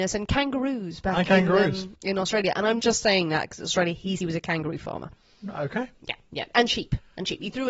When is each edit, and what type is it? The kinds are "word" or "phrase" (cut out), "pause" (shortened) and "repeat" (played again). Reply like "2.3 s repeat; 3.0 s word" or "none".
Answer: 2.8 s word; 4.2 s word